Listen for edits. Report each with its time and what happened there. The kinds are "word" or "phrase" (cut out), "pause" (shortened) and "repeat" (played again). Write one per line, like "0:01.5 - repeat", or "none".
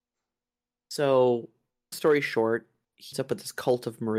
0:01.9 - word
0:03.1 - word